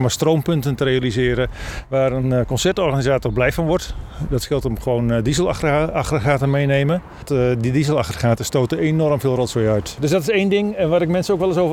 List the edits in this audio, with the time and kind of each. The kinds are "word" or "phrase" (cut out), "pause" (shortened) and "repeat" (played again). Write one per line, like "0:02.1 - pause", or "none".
none